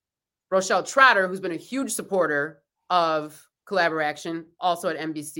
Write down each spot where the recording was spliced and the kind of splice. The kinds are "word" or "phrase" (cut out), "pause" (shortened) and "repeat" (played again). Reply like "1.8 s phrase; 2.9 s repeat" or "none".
none